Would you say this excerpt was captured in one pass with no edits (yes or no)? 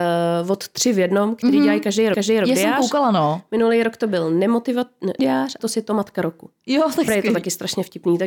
no